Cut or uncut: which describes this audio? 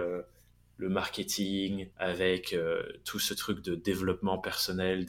cut